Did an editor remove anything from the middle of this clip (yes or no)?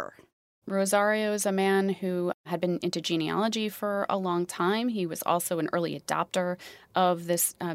no